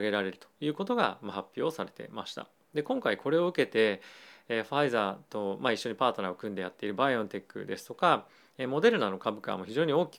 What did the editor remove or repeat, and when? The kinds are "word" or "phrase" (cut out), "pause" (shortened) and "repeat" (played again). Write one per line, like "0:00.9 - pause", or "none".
none